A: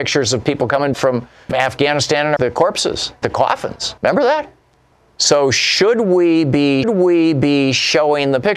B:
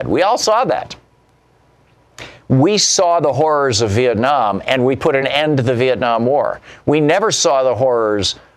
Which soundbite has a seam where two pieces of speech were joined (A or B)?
A